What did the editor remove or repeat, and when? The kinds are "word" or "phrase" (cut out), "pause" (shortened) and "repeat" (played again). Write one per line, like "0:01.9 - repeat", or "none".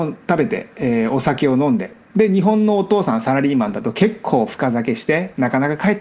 0:02.0 - pause

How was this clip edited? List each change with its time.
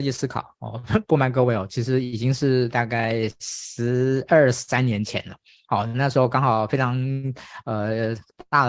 none

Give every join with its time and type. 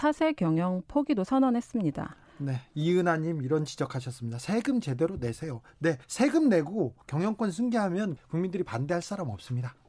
0:06.0 - pause
0:08.2 - word

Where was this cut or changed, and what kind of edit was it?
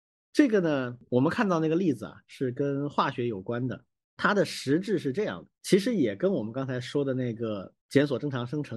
0:04.0 - pause
0:05.6 - pause
0:07.8 - pause

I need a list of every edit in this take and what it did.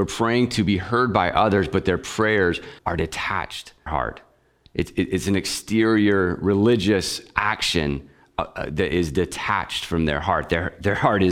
0:02.8 - pause
0:03.9 - phrase

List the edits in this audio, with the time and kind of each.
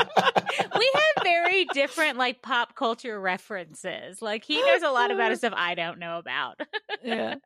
none

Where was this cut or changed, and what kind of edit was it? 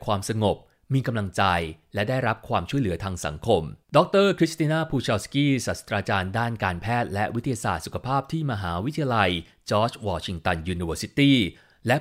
0:03.8 - pause

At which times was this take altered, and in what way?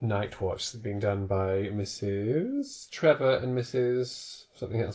none

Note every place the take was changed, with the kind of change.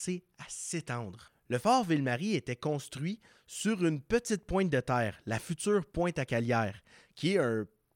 none

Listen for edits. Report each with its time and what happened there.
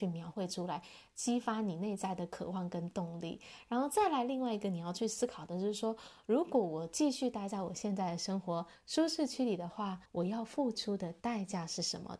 0:10.1 - pause

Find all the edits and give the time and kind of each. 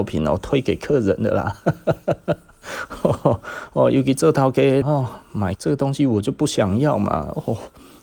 0:04.8 - word
0:05.5 - word

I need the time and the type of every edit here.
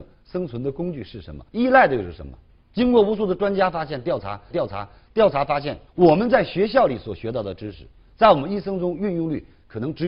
0:01.5 - pause
0:04.5 - repeat
0:05.9 - pause

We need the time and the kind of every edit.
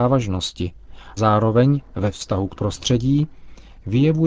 0:01.2 - word
0:02.6 - word

